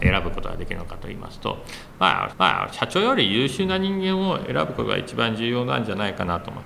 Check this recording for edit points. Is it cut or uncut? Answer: cut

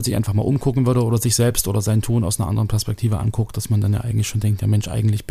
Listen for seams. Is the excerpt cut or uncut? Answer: uncut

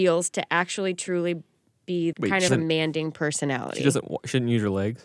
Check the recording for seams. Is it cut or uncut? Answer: cut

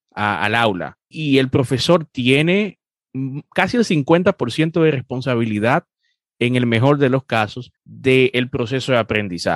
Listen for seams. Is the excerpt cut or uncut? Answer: cut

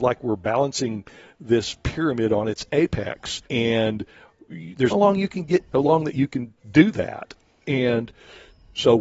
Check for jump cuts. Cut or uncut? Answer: cut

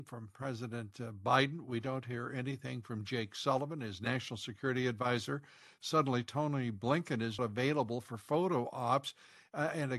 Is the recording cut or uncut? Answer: cut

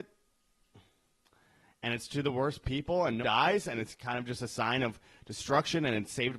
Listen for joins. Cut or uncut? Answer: cut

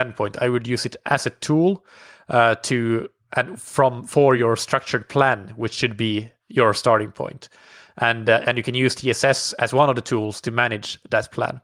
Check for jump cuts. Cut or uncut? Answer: uncut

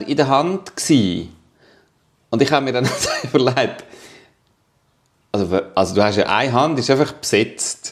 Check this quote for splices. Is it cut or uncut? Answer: uncut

